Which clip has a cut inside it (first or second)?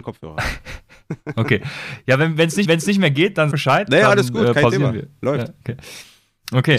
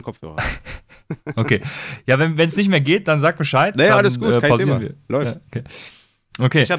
first